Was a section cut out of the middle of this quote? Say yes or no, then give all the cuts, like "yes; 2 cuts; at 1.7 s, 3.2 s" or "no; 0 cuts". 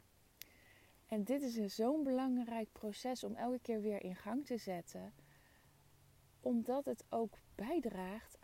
no; 0 cuts